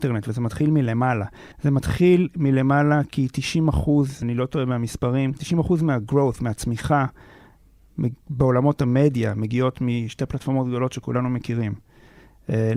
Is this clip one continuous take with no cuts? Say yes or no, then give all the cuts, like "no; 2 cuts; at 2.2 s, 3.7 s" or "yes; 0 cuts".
no; 2 cuts; at 1.5 s, 4.2 s